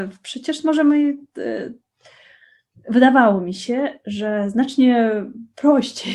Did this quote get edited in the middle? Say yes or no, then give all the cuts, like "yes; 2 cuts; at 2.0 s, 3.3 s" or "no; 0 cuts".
no; 0 cuts